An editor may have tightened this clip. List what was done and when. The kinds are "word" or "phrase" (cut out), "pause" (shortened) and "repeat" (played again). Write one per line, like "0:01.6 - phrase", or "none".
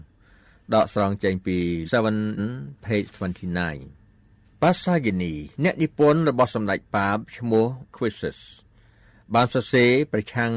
0:01.8 - word
0:02.4 - phrase
0:05.5 - pause
0:07.9 - word